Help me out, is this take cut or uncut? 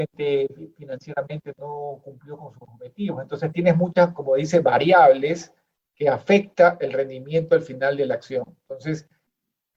uncut